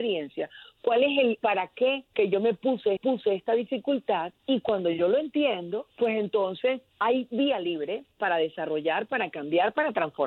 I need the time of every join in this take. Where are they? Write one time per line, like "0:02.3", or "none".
0:03.0
0:05.9
0:06.9